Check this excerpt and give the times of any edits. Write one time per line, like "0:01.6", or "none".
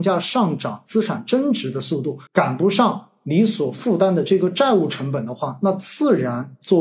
0:02.3

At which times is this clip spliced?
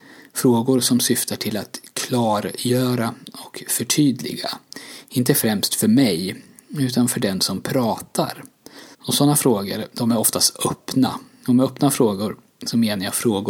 0:08.9

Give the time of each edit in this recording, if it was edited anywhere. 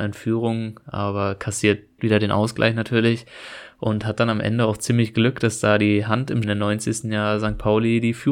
0:02.0
0:06.4

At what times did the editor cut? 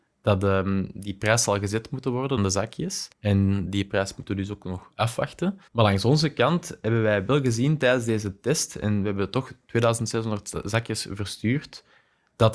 0:02.4
0:03.1
0:05.7

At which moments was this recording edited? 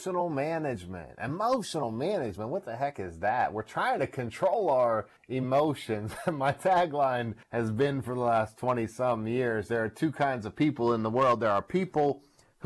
0:05.2
0:07.4

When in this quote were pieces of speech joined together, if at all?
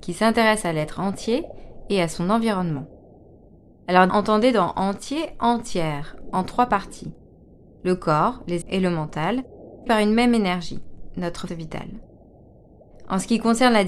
0:04.1
0:08.6
0:09.9
0:11.5

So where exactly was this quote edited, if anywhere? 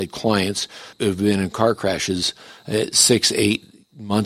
0:00.9

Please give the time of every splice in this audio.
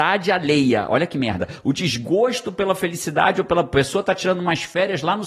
none

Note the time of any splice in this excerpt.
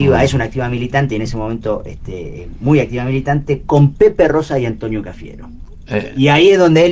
none

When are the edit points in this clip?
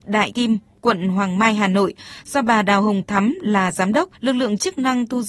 0:04.1

